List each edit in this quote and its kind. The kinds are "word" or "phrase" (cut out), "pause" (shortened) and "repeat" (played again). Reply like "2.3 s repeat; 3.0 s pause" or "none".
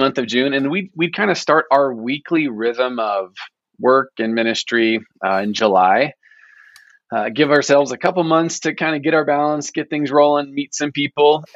none